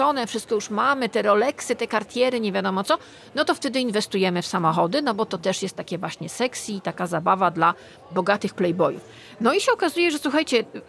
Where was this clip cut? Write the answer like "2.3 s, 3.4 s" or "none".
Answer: none